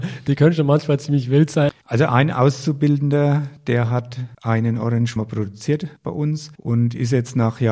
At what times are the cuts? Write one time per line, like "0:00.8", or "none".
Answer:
0:05.2